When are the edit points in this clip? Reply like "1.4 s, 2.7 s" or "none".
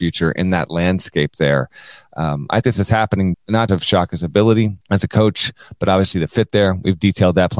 2.6 s, 3.3 s, 3.7 s, 4.8 s